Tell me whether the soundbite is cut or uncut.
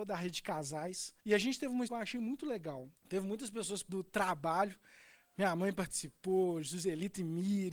cut